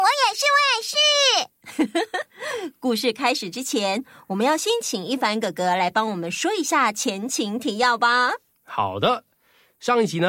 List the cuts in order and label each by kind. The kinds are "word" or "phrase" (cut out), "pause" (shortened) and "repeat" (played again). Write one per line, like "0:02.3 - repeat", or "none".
none

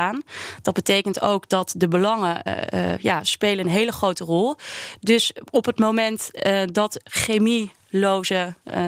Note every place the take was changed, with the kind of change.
0:02.5 - word
0:07.0 - word

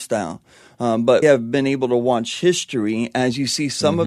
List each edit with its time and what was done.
0:01.2 - word

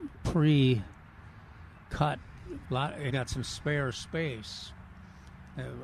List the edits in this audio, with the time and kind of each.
0:02.6 - word
0:03.1 - word

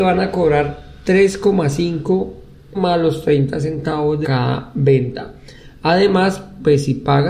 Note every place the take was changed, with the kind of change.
0:02.7 - word
0:04.2 - phrase

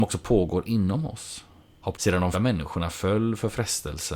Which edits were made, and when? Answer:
0:01.9 - word
0:02.3 - word

